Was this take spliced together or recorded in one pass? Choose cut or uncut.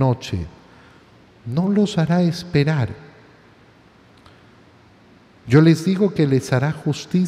uncut